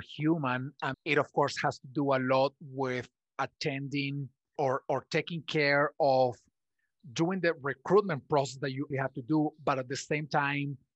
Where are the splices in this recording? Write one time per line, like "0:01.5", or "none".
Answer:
0:00.9
0:04.6
0:08.9